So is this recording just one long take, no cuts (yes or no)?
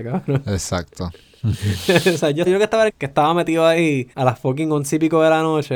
no